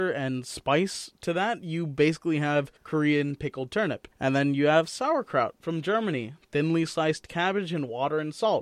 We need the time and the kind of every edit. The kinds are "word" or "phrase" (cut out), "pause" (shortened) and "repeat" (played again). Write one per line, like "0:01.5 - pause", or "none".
0:02.8 - pause
0:04.1 - pause